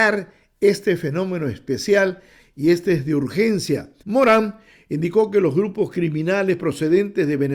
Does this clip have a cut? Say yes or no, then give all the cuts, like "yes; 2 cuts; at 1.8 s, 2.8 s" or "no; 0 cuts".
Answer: yes; 1 cut; at 4.0 s